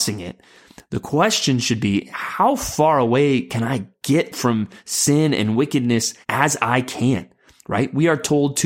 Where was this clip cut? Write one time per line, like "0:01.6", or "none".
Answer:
0:06.2

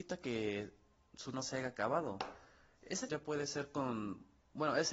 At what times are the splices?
0:01.3
0:03.1

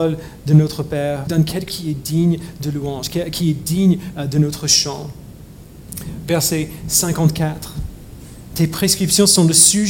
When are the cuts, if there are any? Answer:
0:01.3
0:01.7

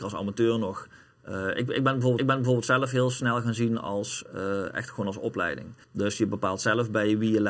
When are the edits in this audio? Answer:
0:02.2
0:05.8

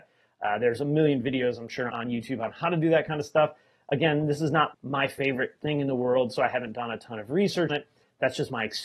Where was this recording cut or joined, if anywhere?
0:01.9
0:04.7
0:07.7

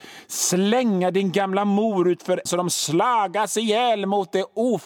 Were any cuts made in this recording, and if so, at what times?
0:02.5

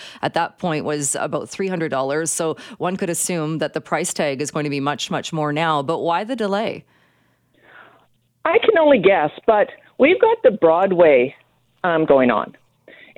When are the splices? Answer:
0:01.9
0:12.1

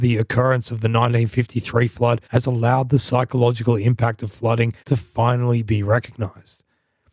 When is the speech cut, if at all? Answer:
0:02.2
0:04.8

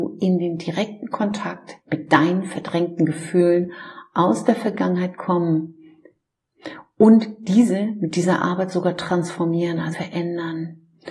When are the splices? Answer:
0:01.8
0:09.9

